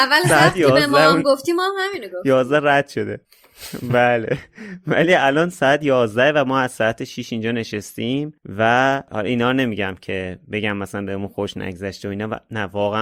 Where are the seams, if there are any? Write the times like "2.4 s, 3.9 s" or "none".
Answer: none